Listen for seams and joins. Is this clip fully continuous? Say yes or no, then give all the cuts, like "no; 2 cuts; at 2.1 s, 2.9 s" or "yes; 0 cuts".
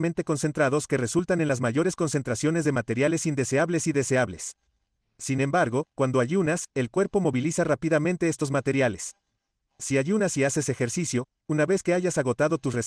yes; 0 cuts